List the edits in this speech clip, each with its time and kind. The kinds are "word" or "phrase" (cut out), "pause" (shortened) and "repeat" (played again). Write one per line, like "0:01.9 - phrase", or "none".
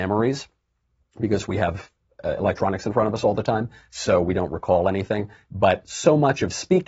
none